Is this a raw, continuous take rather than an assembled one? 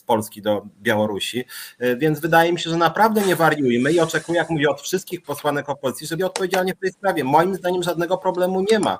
no; 2 cuts; at 5.2 s, 6.2 s

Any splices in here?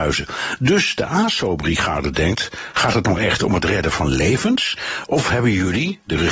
no; 0 cuts

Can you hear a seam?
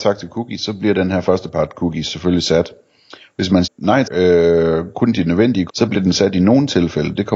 yes; 3 cuts; at 3.6 s, 4.0 s, 5.7 s

